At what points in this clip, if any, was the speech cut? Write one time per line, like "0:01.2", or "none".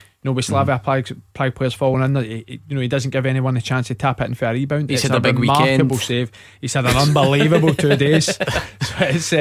none

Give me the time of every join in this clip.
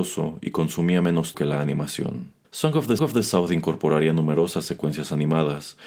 0:01.3
0:02.4
0:03.0

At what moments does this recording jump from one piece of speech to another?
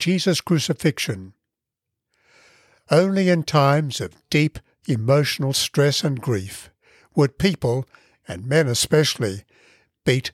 none

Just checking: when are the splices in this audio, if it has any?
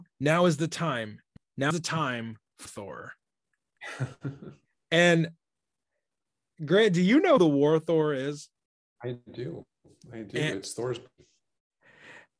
0:01.7
0:02.7
0:07.4

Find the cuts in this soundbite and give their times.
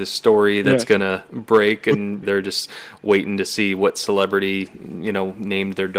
0:02.2

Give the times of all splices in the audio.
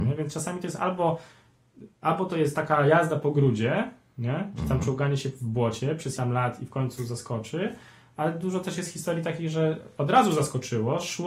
0:06.2

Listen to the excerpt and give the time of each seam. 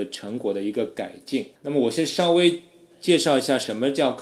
0:01.6

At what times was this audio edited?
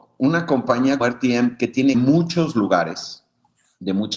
0:01.0
0:01.9

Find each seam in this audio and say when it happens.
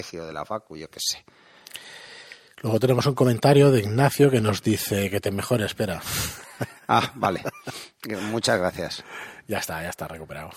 none

